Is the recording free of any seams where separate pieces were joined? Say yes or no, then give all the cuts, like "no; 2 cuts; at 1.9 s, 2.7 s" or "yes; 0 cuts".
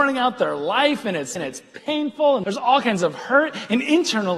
no; 2 cuts; at 1.4 s, 2.4 s